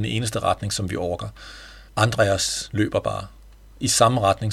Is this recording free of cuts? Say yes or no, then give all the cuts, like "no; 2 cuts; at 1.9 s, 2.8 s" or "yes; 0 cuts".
no; 1 cut; at 1.9 s